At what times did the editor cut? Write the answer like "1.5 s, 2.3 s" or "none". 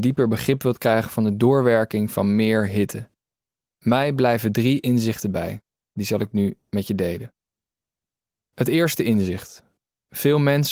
none